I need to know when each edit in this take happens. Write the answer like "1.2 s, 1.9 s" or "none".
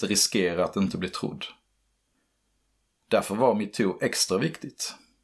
none